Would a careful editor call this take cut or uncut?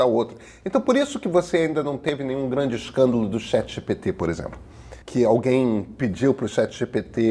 cut